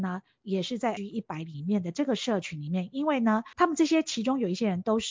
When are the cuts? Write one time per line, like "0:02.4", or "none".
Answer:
0:01.0
0:03.5

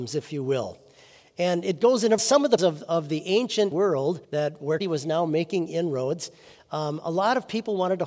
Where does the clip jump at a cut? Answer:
0:02.2
0:02.6
0:03.7
0:04.2
0:04.8

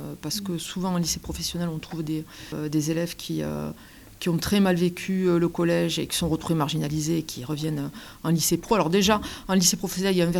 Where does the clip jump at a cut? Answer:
none

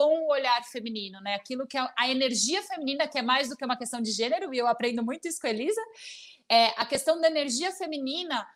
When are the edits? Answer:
none

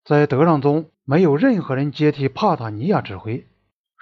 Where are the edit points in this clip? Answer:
0:00.9

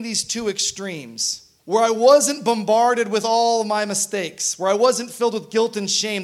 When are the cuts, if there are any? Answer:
0:01.6

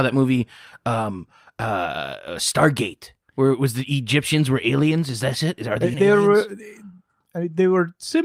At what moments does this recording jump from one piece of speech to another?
0:03.2
0:05.9

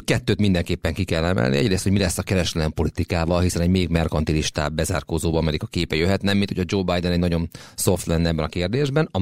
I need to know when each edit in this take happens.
none

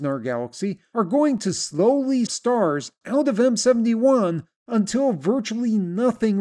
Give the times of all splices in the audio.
0:02.3

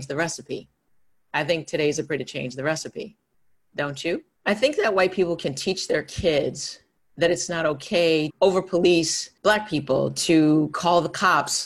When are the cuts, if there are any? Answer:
0:02.2
0:04.4
0:08.3
0:09.4

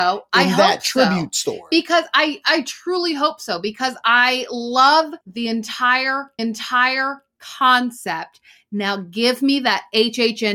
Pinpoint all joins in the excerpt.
0:05.2
0:06.4

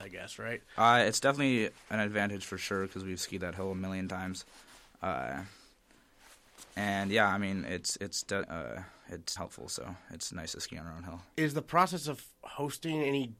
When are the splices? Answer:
0:08.4
0:09.4

